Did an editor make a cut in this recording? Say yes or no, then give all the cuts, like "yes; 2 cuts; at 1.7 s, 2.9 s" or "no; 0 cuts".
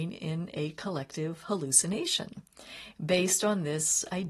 no; 0 cuts